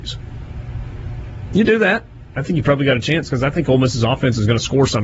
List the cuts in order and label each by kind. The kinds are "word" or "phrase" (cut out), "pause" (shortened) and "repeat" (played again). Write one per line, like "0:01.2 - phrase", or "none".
none